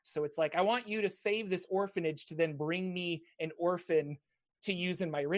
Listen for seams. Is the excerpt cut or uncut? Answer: uncut